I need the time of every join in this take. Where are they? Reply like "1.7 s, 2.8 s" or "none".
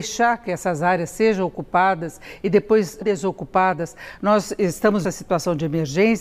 3.0 s, 5.0 s